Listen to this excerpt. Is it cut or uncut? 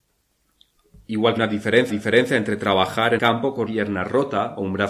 cut